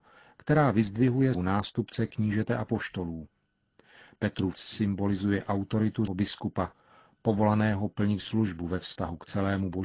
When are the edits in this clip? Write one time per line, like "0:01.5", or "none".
0:01.3
0:04.5
0:06.1
0:08.2